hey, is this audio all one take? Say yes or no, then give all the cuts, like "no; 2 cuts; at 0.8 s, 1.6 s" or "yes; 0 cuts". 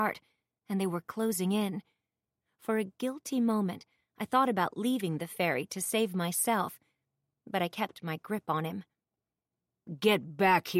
yes; 0 cuts